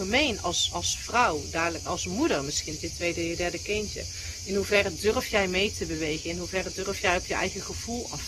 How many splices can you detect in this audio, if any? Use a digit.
2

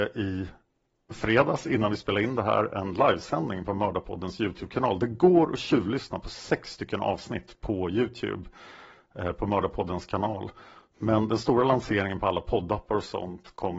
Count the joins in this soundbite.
0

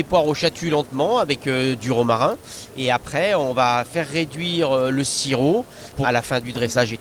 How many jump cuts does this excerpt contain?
1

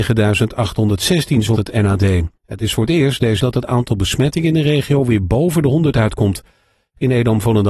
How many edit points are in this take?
3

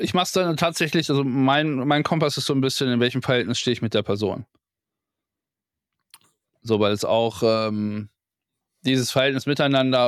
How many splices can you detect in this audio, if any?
0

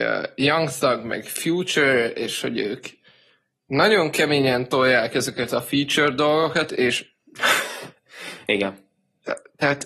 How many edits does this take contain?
0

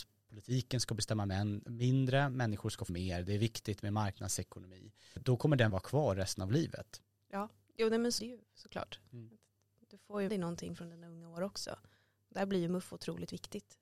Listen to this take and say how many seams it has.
5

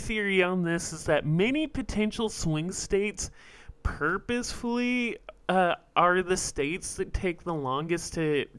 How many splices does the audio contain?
0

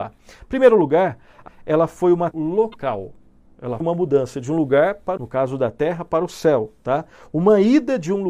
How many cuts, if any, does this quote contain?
4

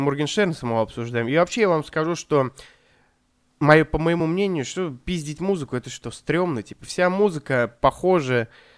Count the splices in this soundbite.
0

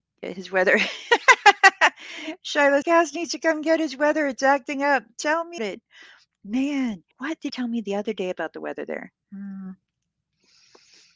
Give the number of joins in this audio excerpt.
5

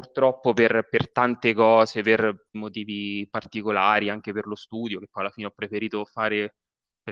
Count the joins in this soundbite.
1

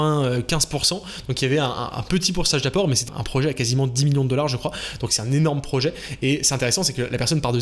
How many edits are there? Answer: 1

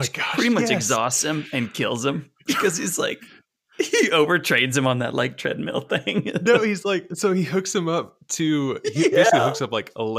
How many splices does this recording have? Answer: 0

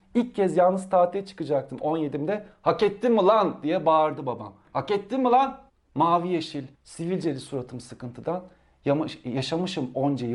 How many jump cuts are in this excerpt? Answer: 2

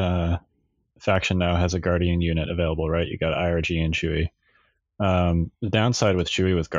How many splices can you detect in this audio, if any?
0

